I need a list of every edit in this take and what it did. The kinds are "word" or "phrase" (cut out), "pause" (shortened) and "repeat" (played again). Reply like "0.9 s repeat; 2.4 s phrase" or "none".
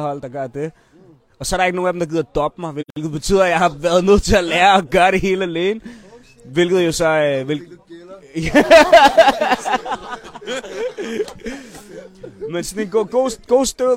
none